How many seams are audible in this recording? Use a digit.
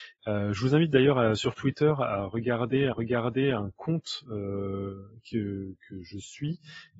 1